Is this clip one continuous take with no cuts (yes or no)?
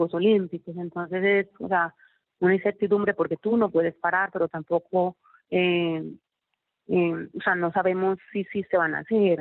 yes